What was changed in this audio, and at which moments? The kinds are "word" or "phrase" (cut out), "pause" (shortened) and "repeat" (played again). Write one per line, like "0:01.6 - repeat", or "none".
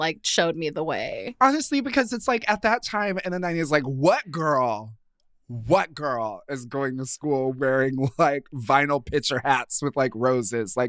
none